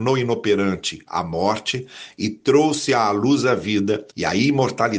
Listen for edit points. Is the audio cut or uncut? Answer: cut